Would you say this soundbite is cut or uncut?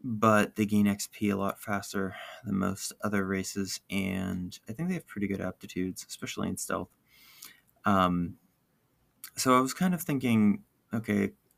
uncut